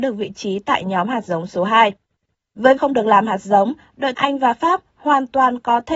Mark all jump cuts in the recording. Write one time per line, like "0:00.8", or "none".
0:02.8
0:04.1